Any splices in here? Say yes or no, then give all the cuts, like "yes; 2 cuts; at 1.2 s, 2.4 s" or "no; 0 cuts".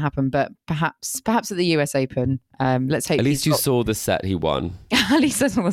no; 0 cuts